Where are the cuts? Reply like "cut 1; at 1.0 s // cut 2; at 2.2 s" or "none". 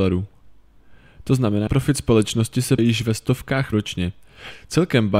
cut 1; at 1.7 s // cut 2; at 2.8 s // cut 3; at 3.7 s

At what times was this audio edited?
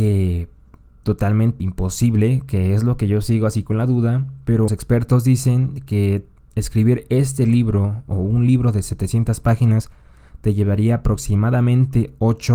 cut 1; at 1.6 s // cut 2; at 4.7 s

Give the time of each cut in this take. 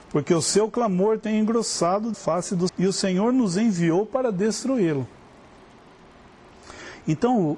cut 1; at 2.1 s // cut 2; at 2.7 s

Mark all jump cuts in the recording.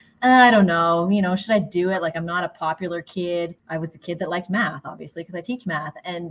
cut 1; at 3.6 s

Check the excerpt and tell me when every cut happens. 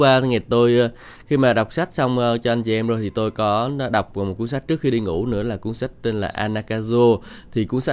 none

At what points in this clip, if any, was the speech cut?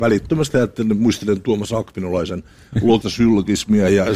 cut 1; at 3.0 s

